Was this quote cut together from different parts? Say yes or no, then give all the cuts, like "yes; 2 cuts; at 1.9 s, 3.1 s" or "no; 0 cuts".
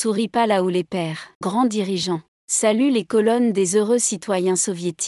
yes; 1 cut; at 1.4 s